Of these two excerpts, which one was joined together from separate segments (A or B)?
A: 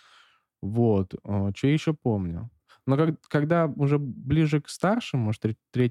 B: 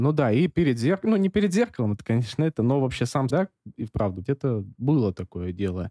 B